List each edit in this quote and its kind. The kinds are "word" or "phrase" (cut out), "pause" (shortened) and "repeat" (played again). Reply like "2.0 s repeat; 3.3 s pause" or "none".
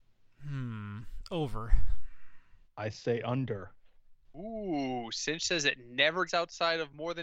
2.6 s pause; 6.3 s word